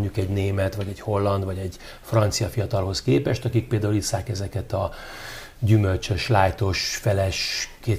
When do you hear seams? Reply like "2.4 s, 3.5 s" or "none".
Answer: none